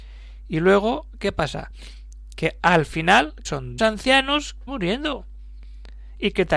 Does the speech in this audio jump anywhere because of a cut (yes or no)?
yes